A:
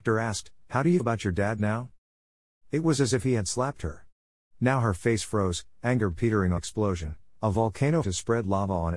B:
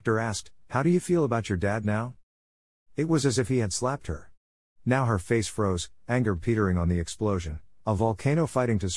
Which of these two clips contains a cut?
A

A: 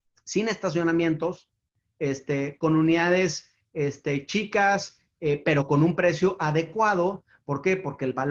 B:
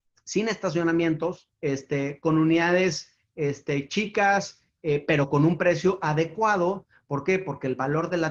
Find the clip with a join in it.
B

